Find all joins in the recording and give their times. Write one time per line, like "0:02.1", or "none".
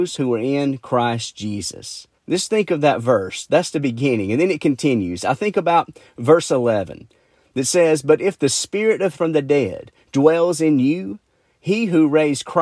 0:02.2
0:09.1